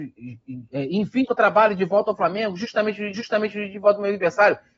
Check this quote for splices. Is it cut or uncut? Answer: cut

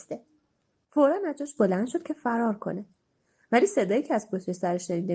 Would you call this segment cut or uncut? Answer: uncut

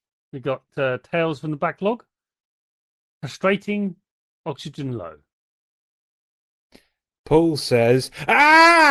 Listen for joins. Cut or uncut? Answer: uncut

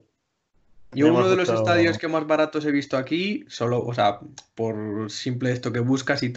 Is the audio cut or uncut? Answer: uncut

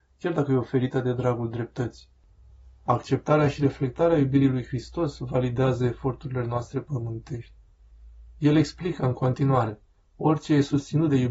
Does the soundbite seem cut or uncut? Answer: uncut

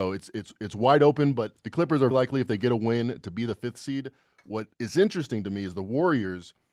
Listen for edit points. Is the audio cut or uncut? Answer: cut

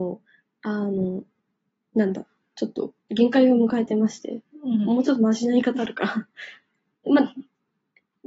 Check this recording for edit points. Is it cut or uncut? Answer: cut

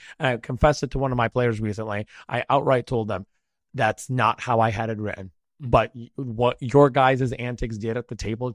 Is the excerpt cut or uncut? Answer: uncut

